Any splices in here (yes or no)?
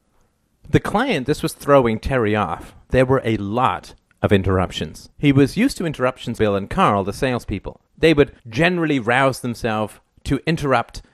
yes